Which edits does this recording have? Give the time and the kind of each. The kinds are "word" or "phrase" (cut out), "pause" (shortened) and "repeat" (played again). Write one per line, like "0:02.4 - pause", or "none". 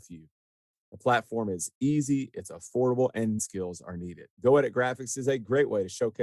0:03.4 - phrase
0:04.3 - pause